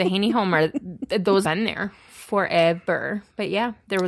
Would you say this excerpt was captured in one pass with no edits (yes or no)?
no